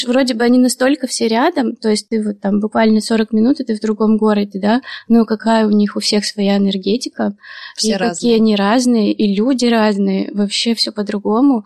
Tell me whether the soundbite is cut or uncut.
uncut